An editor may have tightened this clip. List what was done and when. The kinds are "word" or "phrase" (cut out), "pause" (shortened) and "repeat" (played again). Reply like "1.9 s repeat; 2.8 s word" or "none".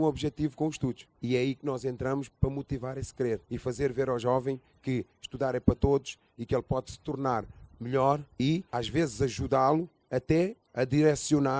1.2 s pause; 3.4 s pause; 8.3 s pause